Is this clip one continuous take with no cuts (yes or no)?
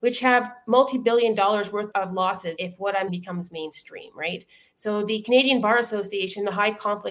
no